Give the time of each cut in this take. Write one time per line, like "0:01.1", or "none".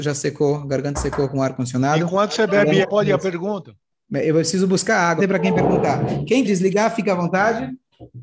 0:00.9
0:02.8
0:03.9
0:05.2
0:06.4